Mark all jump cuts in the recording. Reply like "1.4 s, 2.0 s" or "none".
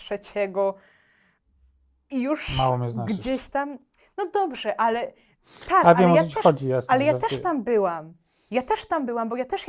none